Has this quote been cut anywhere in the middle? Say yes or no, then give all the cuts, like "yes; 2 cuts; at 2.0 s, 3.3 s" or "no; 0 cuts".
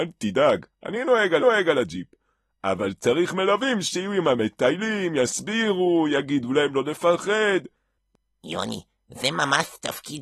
yes; 1 cut; at 1.4 s